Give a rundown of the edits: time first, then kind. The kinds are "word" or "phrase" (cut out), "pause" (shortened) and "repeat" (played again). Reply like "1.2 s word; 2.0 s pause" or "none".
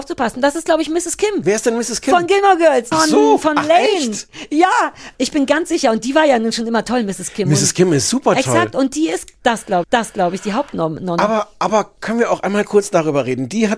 2.9 s phrase; 9.8 s repeat